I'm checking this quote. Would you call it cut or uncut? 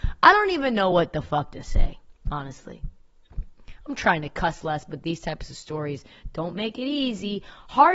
uncut